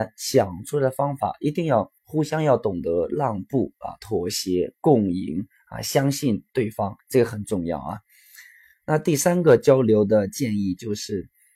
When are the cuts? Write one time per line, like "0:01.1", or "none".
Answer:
0:02.0
0:07.0